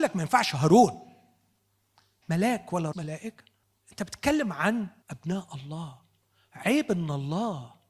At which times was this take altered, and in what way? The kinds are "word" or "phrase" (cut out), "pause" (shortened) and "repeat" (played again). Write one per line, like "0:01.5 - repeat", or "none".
0:02.2 - word
0:02.9 - word
0:03.6 - pause
0:05.0 - pause

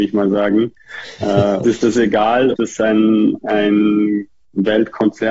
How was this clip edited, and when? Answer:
0:01.6 - word
0:02.5 - word

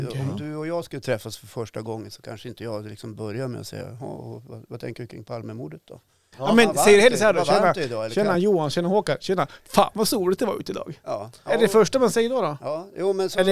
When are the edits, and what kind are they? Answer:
none

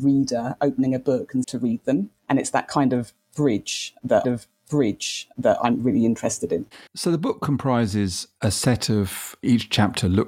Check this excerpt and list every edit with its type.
0:01.4 - phrase
0:02.2 - pause
0:04.2 - repeat
0:06.9 - pause

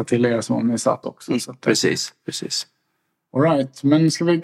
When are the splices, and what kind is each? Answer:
0:01.0 - phrase

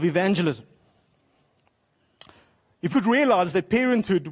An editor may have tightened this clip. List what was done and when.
0:02.9 - word

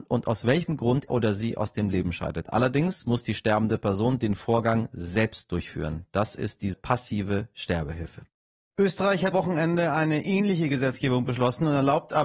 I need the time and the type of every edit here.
0:01.1 - word
0:06.7 - word
0:09.3 - word

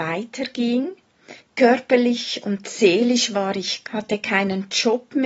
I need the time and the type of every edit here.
0:01.4 - pause
0:03.8 - word

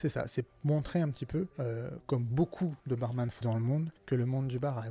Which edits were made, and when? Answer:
0:01.5 - pause
0:02.8 - pause
0:03.4 - word
0:04.0 - pause

